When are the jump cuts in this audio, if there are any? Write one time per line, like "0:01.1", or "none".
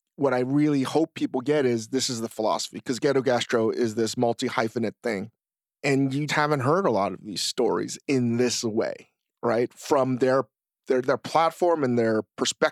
0:06.3
0:10.7